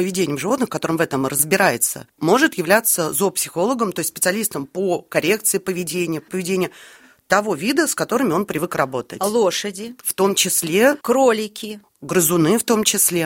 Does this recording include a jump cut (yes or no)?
yes